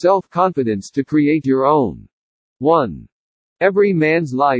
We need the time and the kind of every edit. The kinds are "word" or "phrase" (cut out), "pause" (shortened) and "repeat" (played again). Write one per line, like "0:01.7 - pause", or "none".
none